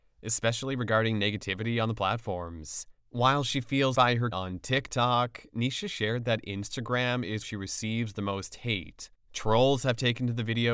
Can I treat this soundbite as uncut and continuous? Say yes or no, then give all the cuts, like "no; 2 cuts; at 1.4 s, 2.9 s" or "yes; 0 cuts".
no; 5 cuts; at 3.0 s, 3.9 s, 4.3 s, 7.4 s, 9.1 s